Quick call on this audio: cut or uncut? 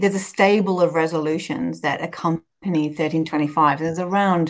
cut